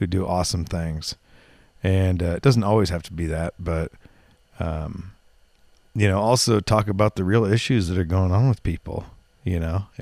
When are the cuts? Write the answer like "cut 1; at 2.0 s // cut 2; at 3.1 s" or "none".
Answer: none